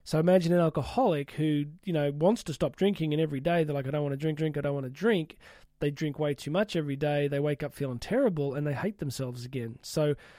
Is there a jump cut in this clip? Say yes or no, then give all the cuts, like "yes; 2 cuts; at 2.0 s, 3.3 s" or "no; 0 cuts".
yes; 1 cut; at 4.4 s